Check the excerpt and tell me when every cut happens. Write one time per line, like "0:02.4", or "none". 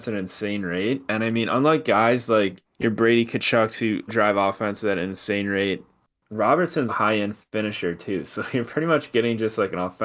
0:02.6
0:04.1
0:06.9